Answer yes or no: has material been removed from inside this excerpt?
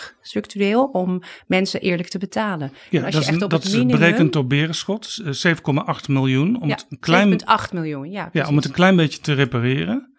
no